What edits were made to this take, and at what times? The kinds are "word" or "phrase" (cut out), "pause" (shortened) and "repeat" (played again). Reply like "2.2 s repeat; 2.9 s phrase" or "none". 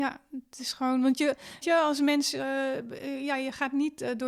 1.6 s word